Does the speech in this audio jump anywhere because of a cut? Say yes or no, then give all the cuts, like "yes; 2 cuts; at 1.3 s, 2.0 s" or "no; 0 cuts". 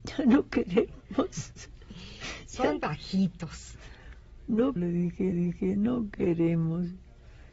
yes; 3 cuts; at 2.8 s, 4.8 s, 5.3 s